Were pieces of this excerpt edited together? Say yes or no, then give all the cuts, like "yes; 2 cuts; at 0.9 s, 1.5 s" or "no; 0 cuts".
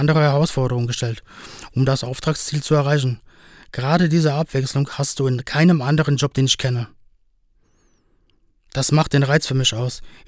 no; 0 cuts